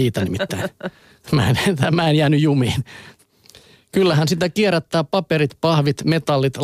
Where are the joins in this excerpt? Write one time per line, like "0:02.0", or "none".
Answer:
none